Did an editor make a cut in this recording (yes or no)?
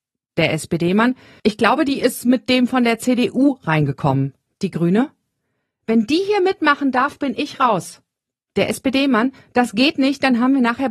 no